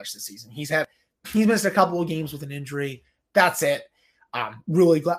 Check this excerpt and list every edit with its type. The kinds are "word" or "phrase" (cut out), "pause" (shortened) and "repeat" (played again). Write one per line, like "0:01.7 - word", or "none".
none